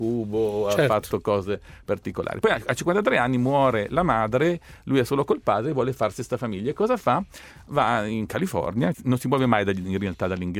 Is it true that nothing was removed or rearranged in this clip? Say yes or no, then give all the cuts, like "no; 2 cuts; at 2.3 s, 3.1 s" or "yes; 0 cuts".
no; 1 cut; at 8.9 s